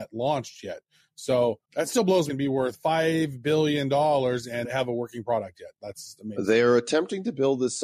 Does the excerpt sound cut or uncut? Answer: cut